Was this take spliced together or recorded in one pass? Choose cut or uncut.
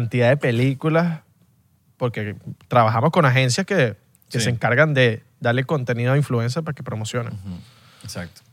uncut